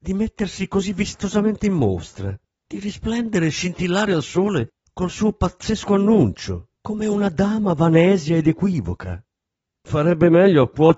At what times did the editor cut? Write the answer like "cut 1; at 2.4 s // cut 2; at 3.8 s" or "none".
none